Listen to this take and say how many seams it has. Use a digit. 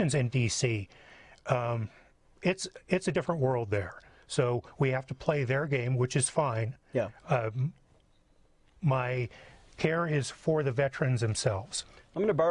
0